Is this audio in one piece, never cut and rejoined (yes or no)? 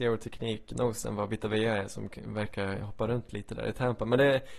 yes